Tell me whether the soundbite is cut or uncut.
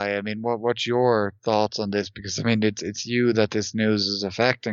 uncut